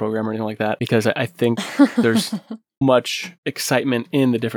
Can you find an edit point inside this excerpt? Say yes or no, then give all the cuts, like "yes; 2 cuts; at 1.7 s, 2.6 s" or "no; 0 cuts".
yes; 1 cut; at 2.8 s